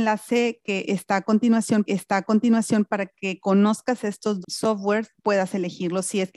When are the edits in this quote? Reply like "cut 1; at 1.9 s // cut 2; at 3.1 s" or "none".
cut 1; at 1.9 s // cut 2; at 4.4 s // cut 3; at 5.2 s